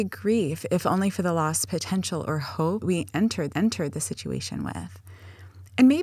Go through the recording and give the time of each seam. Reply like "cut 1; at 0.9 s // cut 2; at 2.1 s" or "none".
cut 1; at 2.8 s // cut 2; at 3.5 s